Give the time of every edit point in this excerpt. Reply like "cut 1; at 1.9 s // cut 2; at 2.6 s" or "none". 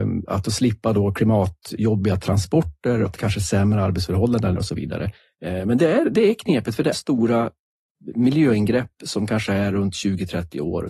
cut 1; at 3.1 s // cut 2; at 4.6 s // cut 3; at 6.9 s